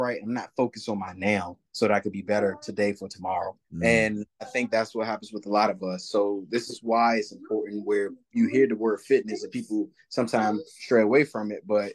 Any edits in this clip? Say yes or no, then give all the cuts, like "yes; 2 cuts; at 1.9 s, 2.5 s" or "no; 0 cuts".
yes; 2 cuts; at 1.7 s, 3.6 s